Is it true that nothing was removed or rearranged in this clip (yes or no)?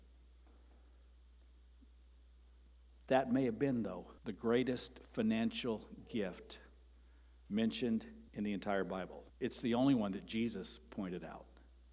no